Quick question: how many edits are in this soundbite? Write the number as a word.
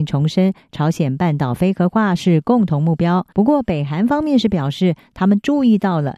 one